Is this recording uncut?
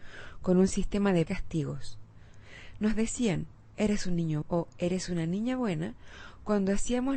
no; 2 cuts; at 1.3 s, 4.4 s

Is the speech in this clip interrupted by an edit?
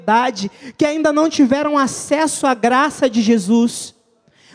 no; 0 cuts

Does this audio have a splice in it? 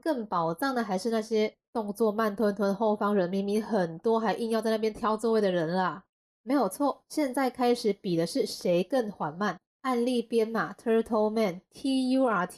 no; 0 cuts

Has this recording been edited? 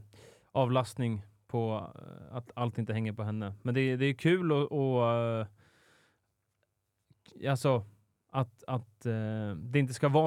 no; 0 cuts

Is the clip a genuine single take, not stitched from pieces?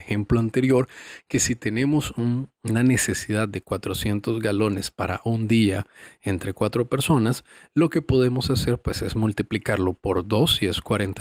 yes; 0 cuts

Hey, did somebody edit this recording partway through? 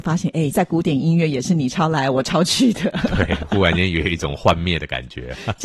no; 0 cuts

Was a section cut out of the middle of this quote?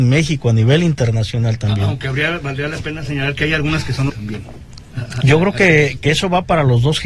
yes; 1 cut; at 4.1 s

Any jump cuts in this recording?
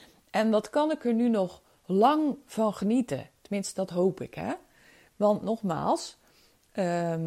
no; 0 cuts

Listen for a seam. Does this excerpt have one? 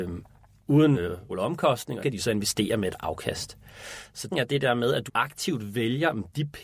yes; 5 cuts; at 0.9 s, 1.3 s, 2.0 s, 4.3 s, 5.1 s

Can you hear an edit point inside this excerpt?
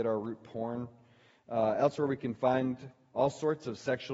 no; 0 cuts

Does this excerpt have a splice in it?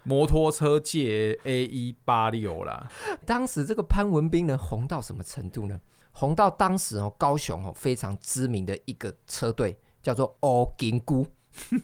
yes; 1 cut; at 3.2 s

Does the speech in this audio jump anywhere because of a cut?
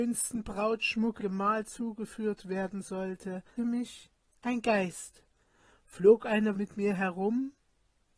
yes; 3 cuts; at 1.2 s, 3.6 s, 6.5 s

